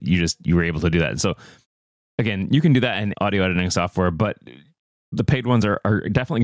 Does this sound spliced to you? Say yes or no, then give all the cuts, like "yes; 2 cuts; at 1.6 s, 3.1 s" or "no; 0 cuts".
yes; 1 cut; at 3.1 s